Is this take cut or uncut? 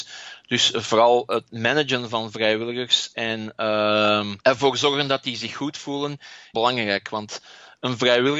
cut